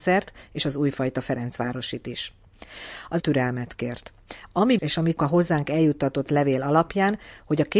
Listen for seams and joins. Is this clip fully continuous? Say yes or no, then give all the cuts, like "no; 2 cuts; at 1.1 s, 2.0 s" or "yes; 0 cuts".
no; 3 cuts; at 3.2 s, 4.8 s, 5.2 s